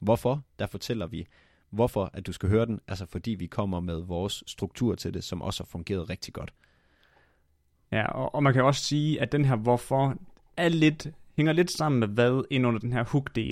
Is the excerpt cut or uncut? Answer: uncut